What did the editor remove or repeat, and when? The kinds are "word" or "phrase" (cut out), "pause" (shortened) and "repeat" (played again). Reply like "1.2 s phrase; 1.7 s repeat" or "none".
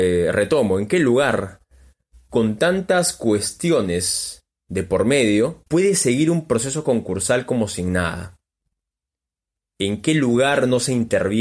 5.7 s pause